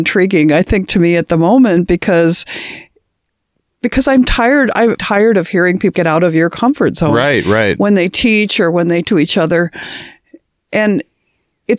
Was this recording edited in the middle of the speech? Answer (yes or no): yes